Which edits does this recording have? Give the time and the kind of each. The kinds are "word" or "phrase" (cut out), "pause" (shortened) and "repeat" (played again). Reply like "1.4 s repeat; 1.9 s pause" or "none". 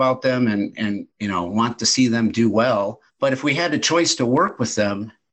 1.1 s pause; 3.1 s pause